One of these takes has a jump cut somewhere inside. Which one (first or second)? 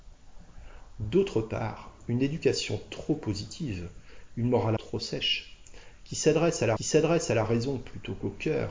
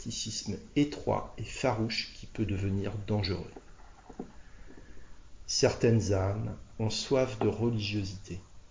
first